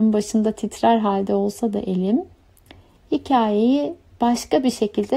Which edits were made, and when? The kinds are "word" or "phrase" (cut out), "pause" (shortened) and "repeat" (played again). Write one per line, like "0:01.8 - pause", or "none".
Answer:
none